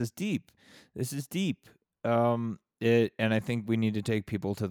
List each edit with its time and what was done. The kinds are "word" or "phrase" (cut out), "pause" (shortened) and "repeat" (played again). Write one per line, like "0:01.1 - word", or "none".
none